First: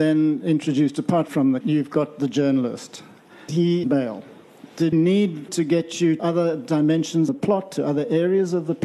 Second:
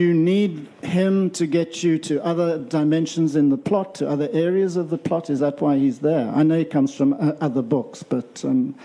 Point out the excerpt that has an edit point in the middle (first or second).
first